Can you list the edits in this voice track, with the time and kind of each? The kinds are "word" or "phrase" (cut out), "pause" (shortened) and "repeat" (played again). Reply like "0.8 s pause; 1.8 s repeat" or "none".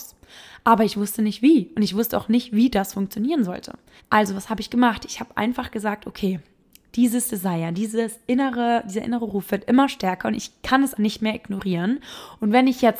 4.0 s pause; 11.0 s word